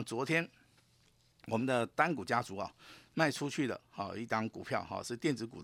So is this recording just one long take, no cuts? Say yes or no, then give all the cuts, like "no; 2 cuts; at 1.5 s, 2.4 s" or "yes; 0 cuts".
yes; 0 cuts